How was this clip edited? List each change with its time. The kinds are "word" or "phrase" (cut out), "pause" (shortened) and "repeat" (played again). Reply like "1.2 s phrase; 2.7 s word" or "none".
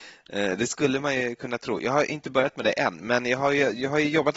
none